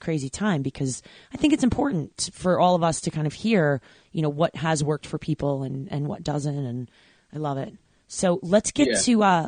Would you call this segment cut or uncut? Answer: uncut